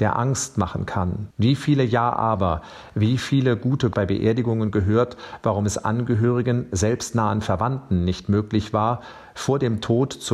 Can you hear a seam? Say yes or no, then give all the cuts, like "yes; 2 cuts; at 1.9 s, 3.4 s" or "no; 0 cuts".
yes; 2 cuts; at 1.3 s, 3.9 s